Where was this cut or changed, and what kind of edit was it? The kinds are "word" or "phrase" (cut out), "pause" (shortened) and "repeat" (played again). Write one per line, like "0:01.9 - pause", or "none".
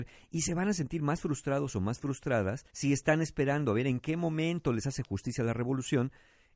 0:02.7 - pause